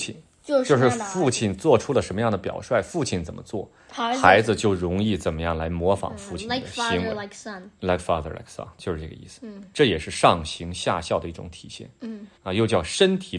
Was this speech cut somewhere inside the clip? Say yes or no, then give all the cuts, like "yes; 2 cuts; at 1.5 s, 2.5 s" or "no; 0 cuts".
yes; 1 cut; at 12.4 s